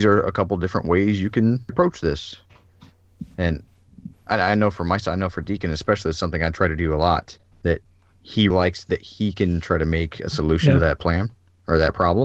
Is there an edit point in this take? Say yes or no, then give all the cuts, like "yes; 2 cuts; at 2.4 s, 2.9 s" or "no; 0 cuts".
yes; 3 cuts; at 1.7 s, 7.5 s, 8.5 s